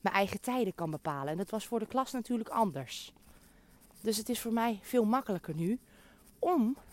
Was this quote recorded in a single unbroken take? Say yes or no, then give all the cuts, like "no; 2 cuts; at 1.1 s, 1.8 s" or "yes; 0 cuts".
yes; 0 cuts